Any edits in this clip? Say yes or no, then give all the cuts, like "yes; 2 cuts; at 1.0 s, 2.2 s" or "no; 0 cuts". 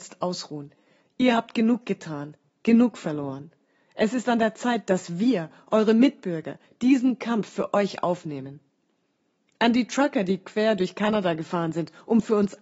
no; 0 cuts